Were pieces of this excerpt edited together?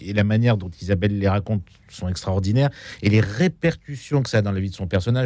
no; 0 cuts

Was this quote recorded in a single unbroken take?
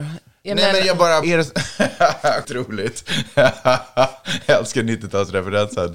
no; 2 cuts; at 1.2 s, 2.4 s

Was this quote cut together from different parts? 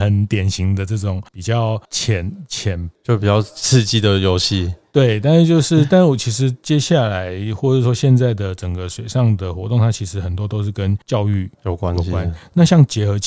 yes; 1 cut; at 11.6 s

